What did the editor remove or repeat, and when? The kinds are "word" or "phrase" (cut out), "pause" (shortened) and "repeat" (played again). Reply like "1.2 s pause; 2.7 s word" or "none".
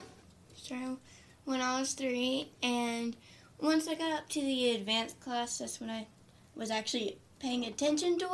none